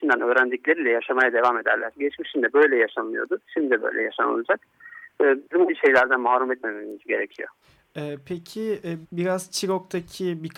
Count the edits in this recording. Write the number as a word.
three